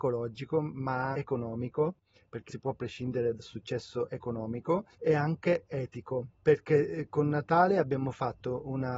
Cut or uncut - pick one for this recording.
cut